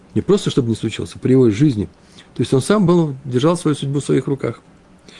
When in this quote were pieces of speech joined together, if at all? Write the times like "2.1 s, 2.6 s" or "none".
none